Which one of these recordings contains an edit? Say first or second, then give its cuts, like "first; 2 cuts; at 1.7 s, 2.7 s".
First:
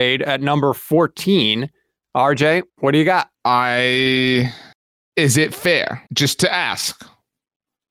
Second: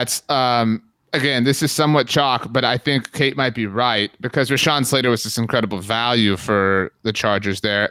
first; 3 cuts; at 2.7 s, 3.3 s, 6.1 s